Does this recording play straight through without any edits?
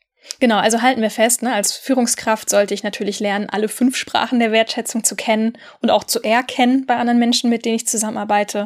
yes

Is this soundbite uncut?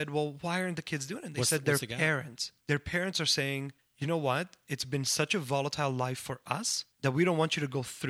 no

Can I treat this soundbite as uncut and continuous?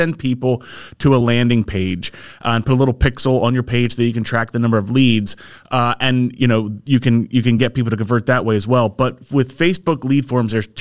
yes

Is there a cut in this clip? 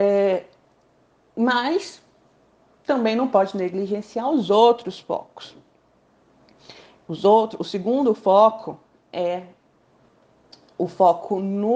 no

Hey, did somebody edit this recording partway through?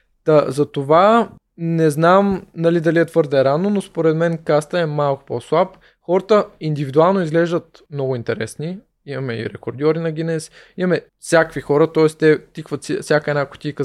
yes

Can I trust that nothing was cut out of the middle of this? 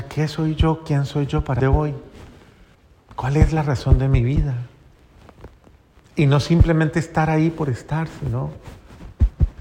no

